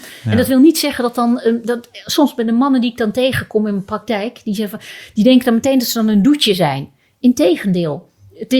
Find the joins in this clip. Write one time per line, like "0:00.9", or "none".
none